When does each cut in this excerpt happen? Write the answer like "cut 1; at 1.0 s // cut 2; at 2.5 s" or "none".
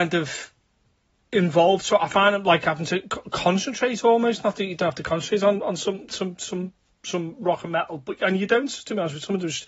none